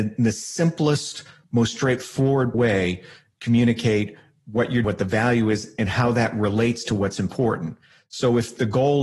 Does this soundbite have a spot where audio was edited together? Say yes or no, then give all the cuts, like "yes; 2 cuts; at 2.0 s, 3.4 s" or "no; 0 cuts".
yes; 2 cuts; at 2.5 s, 4.8 s